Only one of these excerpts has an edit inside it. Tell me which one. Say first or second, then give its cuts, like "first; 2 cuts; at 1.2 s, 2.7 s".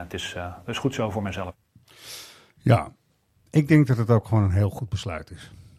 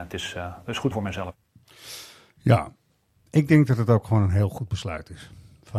second; 1 cut; at 0.9 s